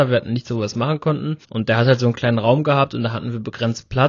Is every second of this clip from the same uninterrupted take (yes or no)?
no